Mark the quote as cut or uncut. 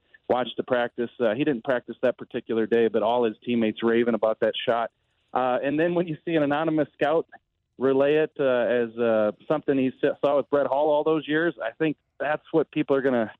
uncut